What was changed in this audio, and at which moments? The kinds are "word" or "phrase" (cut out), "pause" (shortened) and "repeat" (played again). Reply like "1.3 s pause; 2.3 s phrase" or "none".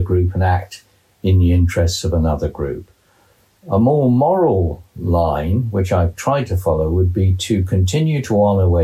none